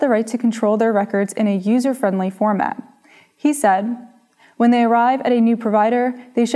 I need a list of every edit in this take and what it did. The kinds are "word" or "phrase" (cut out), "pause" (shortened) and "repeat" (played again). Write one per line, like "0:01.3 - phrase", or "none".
none